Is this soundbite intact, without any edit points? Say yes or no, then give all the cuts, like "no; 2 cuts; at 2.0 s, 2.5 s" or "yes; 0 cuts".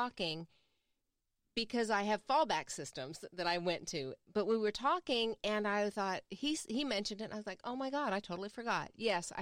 yes; 0 cuts